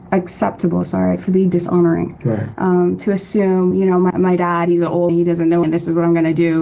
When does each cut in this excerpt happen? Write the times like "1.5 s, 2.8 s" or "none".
1.3 s, 3.7 s, 4.1 s, 5.1 s, 5.6 s